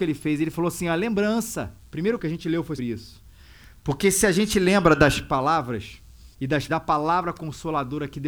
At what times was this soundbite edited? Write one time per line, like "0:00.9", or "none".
0:01.8
0:02.2
0:02.8
0:06.3
0:06.7